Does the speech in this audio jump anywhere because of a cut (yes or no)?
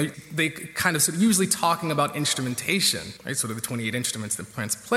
yes